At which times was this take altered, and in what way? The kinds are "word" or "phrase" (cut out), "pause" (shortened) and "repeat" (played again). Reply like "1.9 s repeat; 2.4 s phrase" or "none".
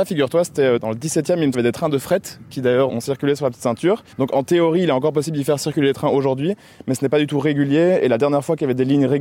1.5 s phrase; 2.9 s word; 4.1 s pause

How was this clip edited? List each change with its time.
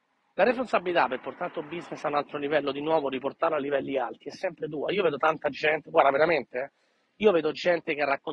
none

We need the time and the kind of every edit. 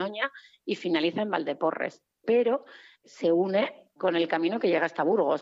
3.0 s word; 4.0 s word

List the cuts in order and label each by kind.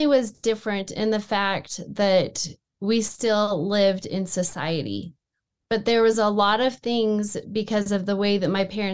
none

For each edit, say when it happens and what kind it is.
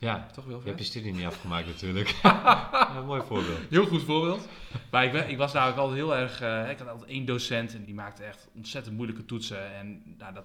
7.9 s word

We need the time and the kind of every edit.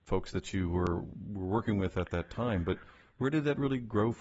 none

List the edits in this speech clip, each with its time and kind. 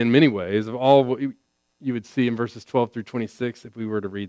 none

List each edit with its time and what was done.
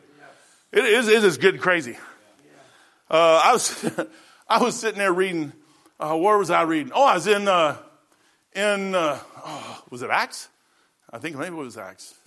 none

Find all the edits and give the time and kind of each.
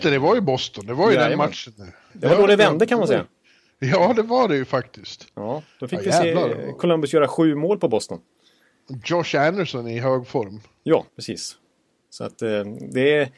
2.1 s word; 11.1 s pause

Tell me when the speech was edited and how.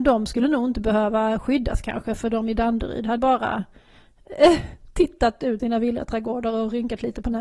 3.2 s word; 5.6 s word

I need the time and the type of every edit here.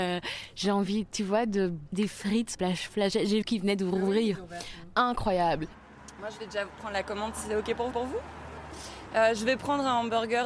1.9 s word; 2.5 s word; 3.4 s word; 7.9 s repeat

